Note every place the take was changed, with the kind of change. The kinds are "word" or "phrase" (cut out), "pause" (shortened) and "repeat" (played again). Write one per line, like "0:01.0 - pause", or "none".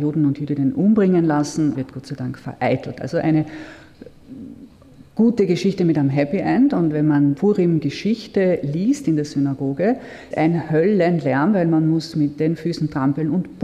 0:01.7 - phrase
0:07.4 - word
0:10.3 - word